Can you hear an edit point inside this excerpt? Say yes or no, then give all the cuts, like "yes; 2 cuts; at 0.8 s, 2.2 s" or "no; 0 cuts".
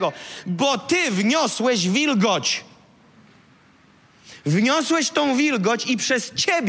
no; 0 cuts